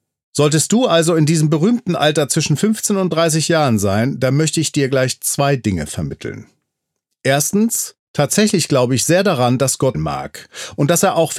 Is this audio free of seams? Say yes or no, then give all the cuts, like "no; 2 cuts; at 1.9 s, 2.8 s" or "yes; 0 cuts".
no; 2 cuts; at 8.0 s, 9.9 s